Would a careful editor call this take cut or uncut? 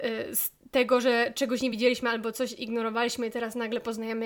uncut